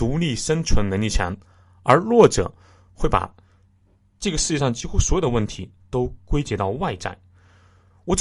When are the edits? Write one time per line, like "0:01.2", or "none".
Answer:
none